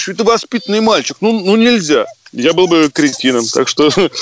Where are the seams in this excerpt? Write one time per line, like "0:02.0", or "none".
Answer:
none